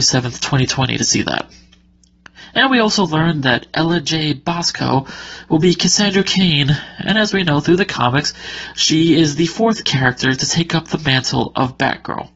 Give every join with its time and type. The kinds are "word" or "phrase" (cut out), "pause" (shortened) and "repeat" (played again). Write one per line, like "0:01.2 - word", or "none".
none